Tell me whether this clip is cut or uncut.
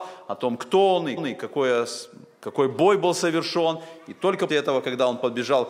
cut